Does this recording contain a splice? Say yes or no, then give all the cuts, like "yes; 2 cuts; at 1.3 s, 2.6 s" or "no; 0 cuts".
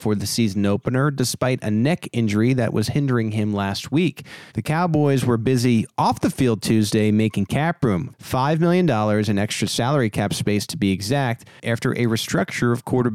yes; 1 cut; at 4.5 s